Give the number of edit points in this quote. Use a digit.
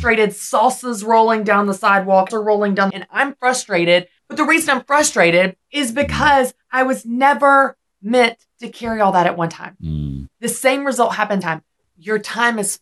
6